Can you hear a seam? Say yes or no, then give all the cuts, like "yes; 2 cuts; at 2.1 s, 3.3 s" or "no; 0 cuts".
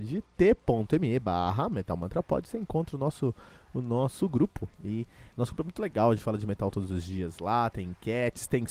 no; 0 cuts